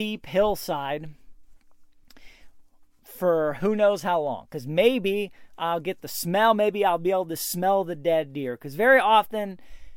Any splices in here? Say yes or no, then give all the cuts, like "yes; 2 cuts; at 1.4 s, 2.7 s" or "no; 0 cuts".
no; 0 cuts